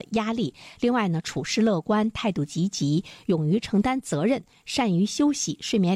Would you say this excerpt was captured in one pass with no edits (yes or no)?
yes